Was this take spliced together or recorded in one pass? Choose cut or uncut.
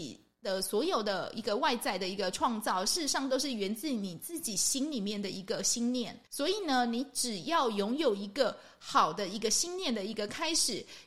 cut